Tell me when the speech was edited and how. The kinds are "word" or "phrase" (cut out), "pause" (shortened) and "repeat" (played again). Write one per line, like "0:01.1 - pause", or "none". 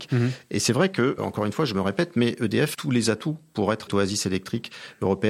0:01.2 - word
0:02.7 - word
0:03.9 - word